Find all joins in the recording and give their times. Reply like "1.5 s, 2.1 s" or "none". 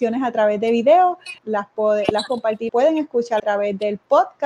1.4 s, 2.3 s, 2.7 s, 3.4 s